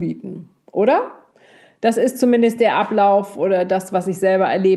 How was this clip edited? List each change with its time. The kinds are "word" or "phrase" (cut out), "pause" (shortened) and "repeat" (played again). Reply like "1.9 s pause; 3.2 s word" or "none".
none